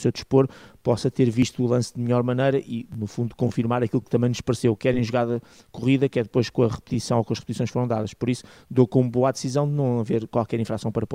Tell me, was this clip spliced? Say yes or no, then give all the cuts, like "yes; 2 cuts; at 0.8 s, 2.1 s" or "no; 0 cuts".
no; 0 cuts